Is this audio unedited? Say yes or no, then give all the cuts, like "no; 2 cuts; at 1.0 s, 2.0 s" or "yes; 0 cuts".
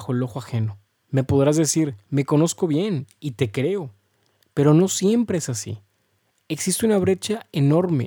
no; 1 cut; at 0.9 s